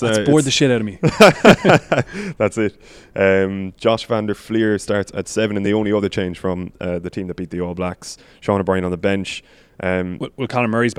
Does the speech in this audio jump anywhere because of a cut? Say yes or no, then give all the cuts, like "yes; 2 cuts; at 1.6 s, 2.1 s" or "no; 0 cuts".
no; 0 cuts